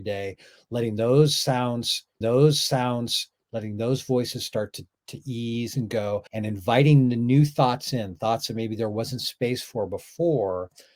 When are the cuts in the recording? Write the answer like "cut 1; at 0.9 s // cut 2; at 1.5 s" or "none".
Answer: cut 1; at 2.2 s // cut 2; at 4.9 s // cut 3; at 6.3 s